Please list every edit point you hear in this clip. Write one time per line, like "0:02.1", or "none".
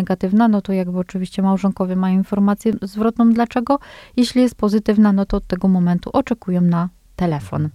none